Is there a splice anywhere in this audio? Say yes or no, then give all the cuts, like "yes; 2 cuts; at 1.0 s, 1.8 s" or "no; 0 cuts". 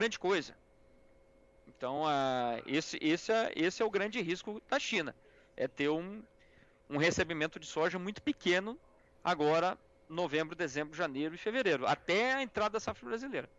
no; 0 cuts